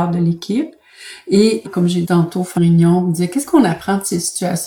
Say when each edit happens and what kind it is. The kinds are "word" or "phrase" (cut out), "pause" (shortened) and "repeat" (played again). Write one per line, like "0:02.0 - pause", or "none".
0:01.6 - word
0:02.0 - word
0:02.6 - word